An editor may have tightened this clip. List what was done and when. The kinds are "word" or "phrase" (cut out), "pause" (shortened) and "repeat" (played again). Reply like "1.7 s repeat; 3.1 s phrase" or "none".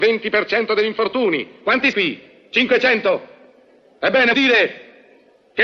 1.9 s word; 4.3 s word